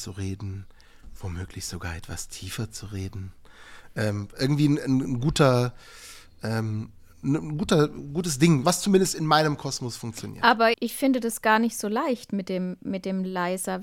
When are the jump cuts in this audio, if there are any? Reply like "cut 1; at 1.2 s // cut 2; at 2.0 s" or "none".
cut 1; at 8.6 s // cut 2; at 10.7 s